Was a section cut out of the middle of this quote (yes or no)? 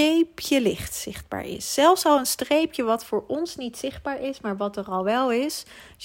no